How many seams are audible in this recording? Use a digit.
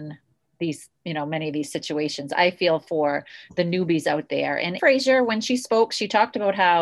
2